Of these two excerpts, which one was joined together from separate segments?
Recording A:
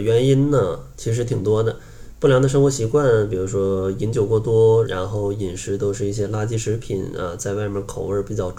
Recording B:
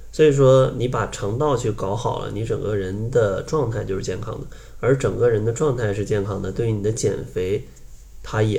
A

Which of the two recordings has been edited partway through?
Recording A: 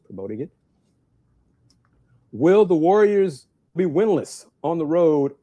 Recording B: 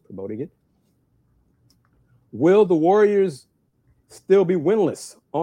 A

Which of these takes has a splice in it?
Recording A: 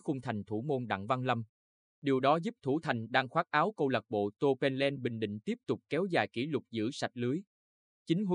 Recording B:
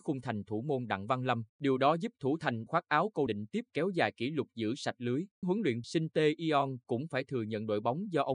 B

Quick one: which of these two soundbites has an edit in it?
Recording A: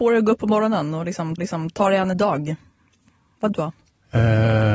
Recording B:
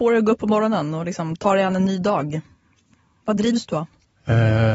A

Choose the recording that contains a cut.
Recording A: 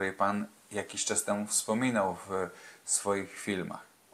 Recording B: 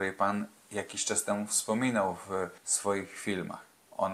B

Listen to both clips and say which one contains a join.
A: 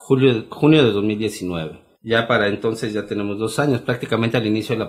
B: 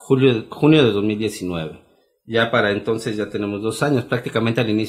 A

